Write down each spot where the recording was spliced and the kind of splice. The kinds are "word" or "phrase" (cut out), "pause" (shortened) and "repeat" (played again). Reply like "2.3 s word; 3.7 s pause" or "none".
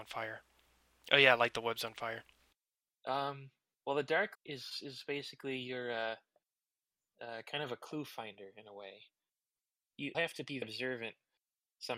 4.3 s word; 10.1 s word; 10.6 s word